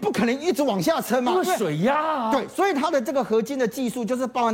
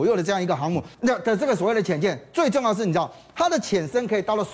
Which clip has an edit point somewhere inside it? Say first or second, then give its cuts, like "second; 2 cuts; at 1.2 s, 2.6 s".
second; 1 cut; at 0.9 s